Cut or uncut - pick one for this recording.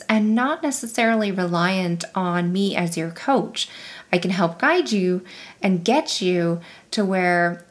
uncut